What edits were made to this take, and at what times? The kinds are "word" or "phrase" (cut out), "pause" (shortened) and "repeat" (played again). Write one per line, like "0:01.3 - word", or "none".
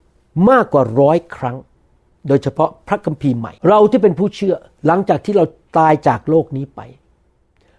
0:03.6 - pause